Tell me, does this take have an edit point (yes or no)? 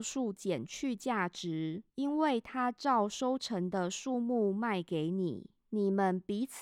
yes